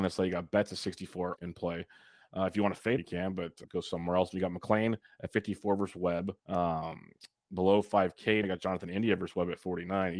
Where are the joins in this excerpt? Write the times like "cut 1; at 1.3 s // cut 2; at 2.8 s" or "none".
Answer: cut 1; at 1.4 s // cut 2; at 3.0 s // cut 3; at 3.6 s // cut 4; at 6.4 s // cut 5; at 8.4 s